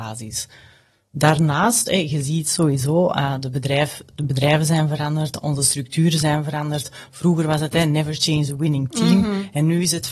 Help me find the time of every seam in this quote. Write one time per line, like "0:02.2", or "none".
none

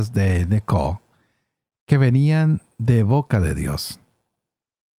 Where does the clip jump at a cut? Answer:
none

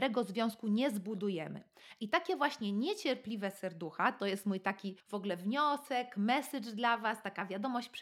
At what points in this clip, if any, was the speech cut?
0:05.0

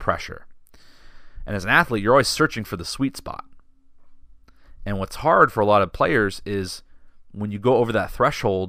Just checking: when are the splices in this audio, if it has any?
none

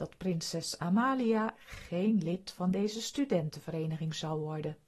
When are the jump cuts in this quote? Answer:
none

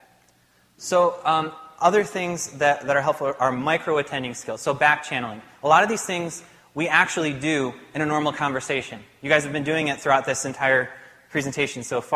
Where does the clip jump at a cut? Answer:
none

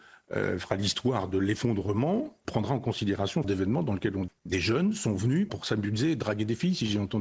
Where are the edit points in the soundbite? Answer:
0:02.4
0:03.4
0:04.3
0:05.5

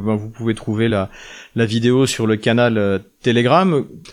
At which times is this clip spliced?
none

